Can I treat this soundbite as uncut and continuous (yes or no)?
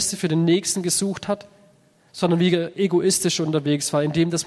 yes